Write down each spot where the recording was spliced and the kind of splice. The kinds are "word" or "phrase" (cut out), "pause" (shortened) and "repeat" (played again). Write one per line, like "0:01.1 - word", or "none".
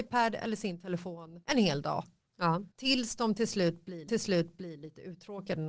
0:01.4 - pause
0:02.7 - pause
0:04.1 - repeat